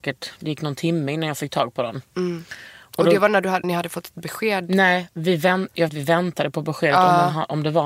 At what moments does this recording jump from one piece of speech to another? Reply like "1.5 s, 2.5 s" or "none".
3.6 s, 5.9 s

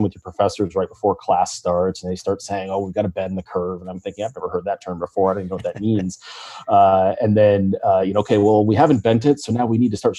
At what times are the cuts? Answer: none

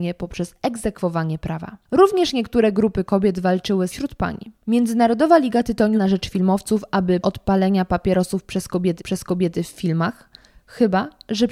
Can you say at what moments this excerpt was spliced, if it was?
1.8 s, 3.9 s, 4.6 s, 5.9 s, 7.2 s, 9.0 s

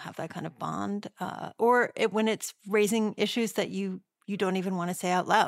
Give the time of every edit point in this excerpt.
none

